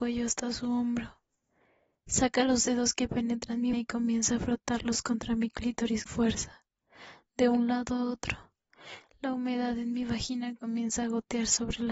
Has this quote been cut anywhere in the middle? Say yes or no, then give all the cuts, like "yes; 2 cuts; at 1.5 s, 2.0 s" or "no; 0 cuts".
yes; 2 cuts; at 3.7 s, 6.1 s